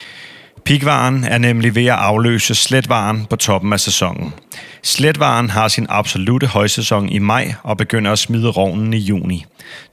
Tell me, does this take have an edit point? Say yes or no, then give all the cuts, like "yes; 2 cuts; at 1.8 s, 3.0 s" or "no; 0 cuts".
no; 0 cuts